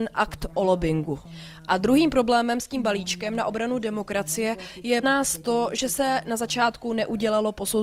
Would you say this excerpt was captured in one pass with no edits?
no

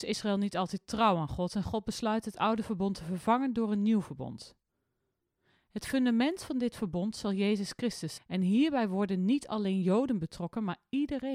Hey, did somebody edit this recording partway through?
yes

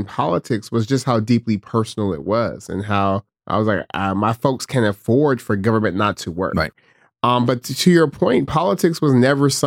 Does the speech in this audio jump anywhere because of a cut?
no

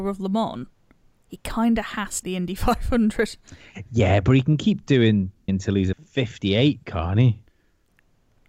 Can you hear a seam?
yes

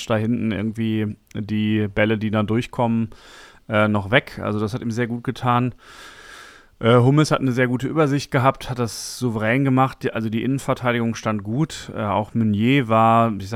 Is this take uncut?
yes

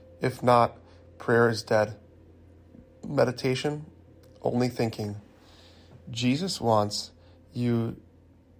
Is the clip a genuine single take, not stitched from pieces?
yes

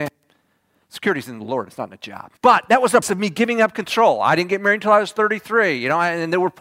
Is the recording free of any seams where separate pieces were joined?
no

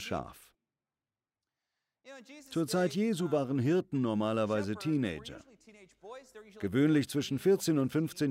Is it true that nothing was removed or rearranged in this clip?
yes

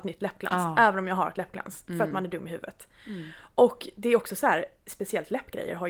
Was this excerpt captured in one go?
yes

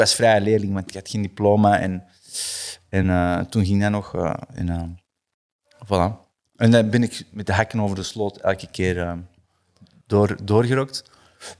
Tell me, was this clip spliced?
no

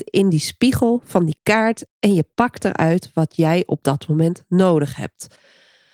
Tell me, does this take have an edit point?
no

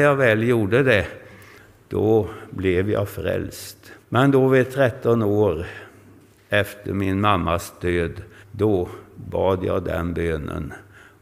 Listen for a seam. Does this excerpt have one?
yes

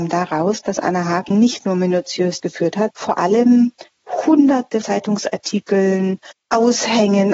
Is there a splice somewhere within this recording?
yes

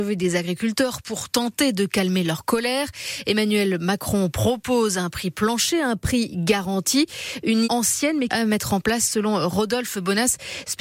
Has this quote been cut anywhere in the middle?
yes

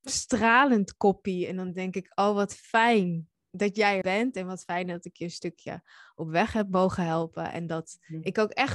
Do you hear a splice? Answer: yes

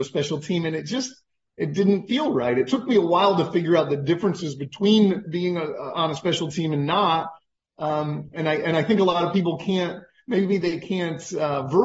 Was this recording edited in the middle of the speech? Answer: no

